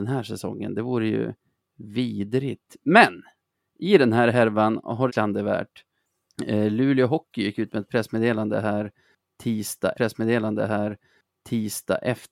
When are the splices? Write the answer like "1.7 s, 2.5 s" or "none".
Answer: 5.1 s, 9.9 s